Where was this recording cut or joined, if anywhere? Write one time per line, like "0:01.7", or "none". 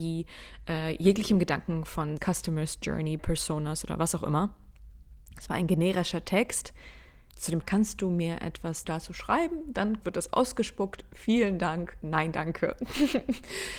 0:02.2
0:03.2
0:07.3
0:07.6
0:08.8
0:10.0

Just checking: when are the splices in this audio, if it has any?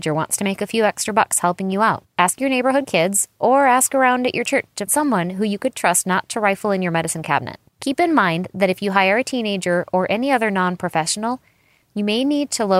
0:02.1
0:04.9
0:07.7

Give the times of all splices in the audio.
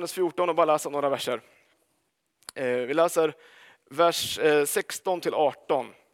none

